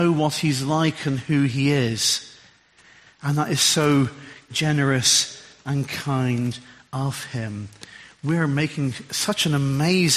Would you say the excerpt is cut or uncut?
uncut